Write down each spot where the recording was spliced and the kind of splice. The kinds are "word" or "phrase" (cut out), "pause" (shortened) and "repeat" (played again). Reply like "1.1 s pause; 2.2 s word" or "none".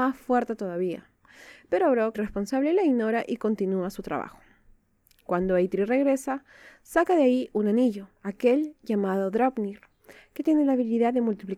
2.1 s word; 8.2 s pause

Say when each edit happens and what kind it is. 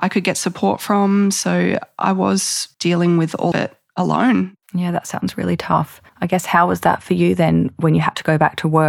2.7 s pause; 3.5 s word; 4.6 s pause; 6.1 s pause

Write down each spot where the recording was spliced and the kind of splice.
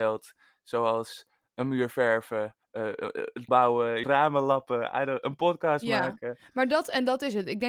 2.6 s pause; 3.5 s word; 4.0 s phrase

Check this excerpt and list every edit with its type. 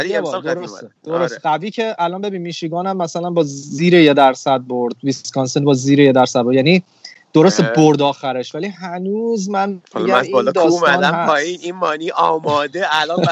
1.0 s pause

